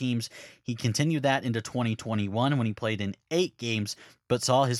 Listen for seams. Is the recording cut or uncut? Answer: uncut